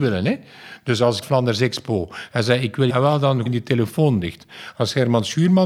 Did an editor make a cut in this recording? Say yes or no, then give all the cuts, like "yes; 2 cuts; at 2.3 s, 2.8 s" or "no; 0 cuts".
yes; 3 cuts; at 1.2 s, 2.9 s, 3.5 s